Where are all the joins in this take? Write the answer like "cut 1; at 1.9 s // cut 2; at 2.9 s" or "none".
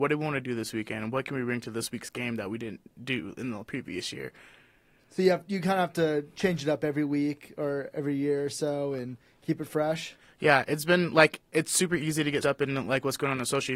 cut 1; at 12.4 s